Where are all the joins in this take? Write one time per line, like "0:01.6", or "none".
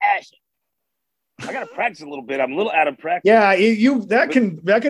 none